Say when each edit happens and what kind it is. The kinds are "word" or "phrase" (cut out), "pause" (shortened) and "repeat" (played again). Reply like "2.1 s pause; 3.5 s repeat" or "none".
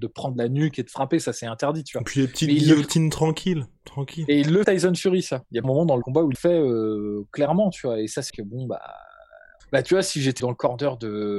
4.6 s word; 5.6 s word; 6.0 s word; 6.3 s word; 8.3 s word; 9.6 s word; 10.4 s word